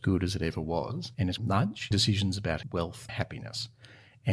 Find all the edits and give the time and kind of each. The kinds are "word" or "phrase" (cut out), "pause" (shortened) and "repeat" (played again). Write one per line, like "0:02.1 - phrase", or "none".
0:01.4 - word
0:01.9 - word
0:02.6 - word
0:03.1 - word